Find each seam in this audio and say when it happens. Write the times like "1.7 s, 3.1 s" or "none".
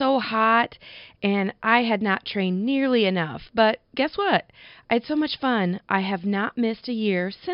none